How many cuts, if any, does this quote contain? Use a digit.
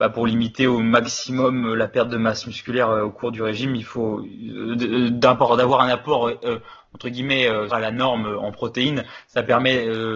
1